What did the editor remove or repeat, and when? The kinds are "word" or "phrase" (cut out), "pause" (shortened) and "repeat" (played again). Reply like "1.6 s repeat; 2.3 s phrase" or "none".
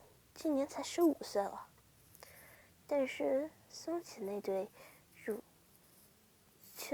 none

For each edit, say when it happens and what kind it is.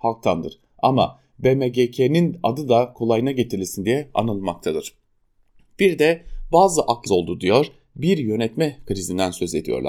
7.1 s phrase

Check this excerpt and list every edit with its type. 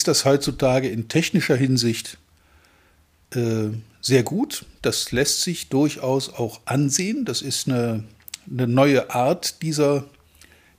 none

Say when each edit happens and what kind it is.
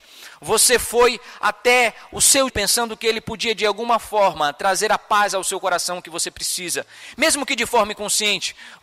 2.5 s word

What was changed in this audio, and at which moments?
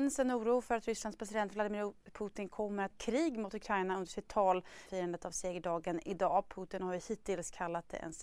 2.9 s word; 4.9 s phrase

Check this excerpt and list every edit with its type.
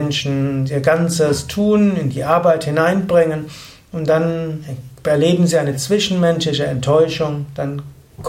none

